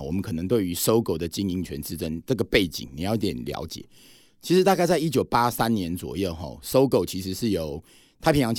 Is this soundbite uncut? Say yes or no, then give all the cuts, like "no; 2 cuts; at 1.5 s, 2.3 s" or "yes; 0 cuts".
yes; 0 cuts